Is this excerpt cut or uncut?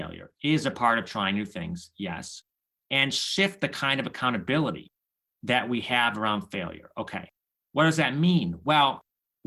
uncut